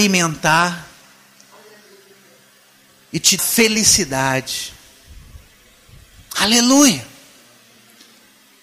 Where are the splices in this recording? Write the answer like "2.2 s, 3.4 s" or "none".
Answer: 3.4 s

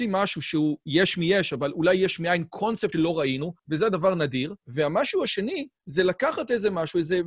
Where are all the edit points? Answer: 2.9 s, 3.6 s, 4.6 s, 5.8 s

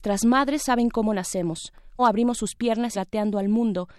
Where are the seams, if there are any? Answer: 2.0 s, 2.9 s

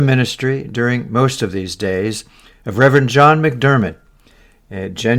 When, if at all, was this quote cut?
none

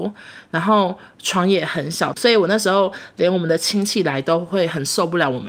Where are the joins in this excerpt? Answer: 2.2 s

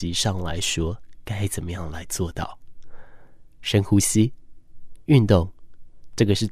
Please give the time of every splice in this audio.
none

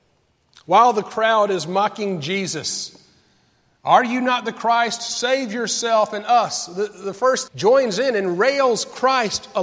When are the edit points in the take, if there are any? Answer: 7.5 s

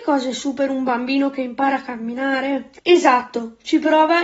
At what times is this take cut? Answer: 2.8 s

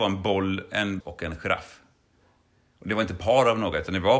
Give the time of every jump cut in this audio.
1.0 s

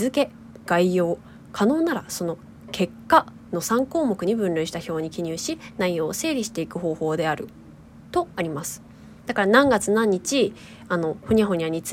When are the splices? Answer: 9.2 s

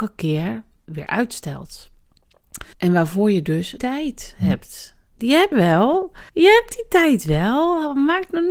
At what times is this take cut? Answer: 2.7 s, 3.8 s, 5.5 s, 6.3 s

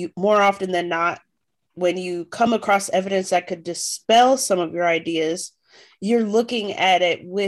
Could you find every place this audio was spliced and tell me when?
none

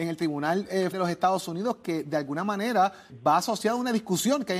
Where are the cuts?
0.9 s, 3.1 s

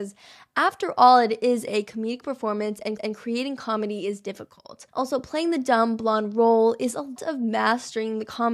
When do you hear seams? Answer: 3.0 s, 4.9 s, 7.2 s

